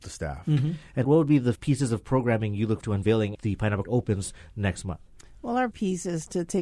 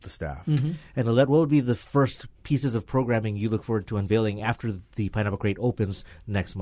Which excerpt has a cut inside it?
first; 6 cuts; at 1.0 s, 1.5 s, 2.8 s, 3.3 s, 3.8 s, 5.7 s

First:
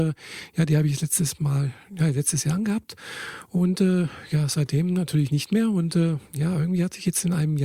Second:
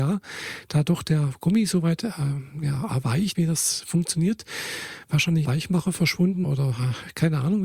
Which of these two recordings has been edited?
second; 4 cuts; at 2.9 s, 3.3 s, 5.4 s, 6.4 s

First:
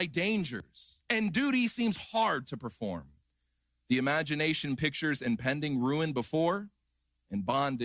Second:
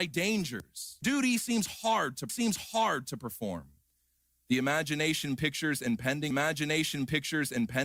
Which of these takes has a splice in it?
second; 3 cuts; at 1.0 s, 2.3 s, 6.3 s

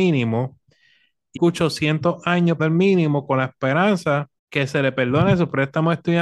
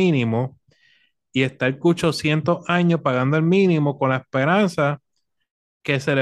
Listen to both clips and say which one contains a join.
first; 3 cuts; at 1.4 s, 2.6 s, 4.4 s

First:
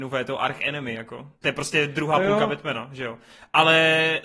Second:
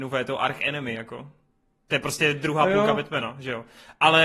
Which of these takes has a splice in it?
first; 1 cut; at 1.3 s

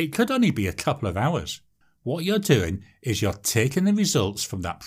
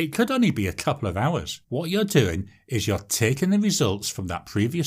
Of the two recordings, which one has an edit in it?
second; 1 cut; at 1.6 s

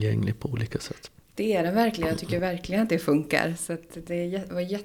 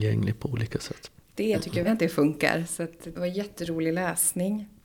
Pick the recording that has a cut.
second; 3 cuts; at 1.5 s, 1.8 s, 3.1 s

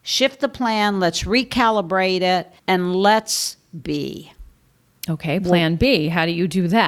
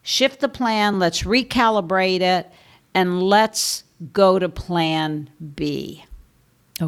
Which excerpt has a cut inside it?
first; 2 cuts; at 2.6 s, 3.8 s

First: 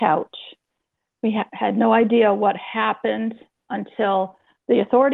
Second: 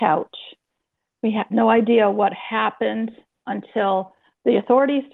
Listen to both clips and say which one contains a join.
second; 1 cut; at 1.5 s

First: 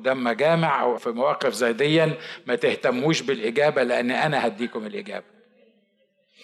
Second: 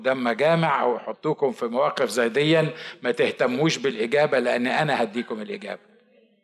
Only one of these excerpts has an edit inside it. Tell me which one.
first; 1 cut; at 1.0 s

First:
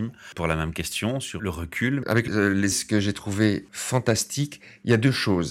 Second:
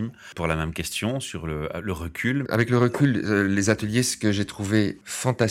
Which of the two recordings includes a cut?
first; 3 cuts; at 1.4 s, 2.3 s, 2.7 s

